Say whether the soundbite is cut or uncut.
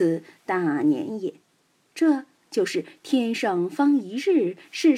uncut